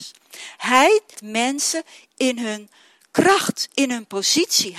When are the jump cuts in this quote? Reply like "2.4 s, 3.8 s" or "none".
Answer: 1.2 s